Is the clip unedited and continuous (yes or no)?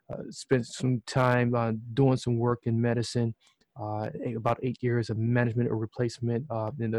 yes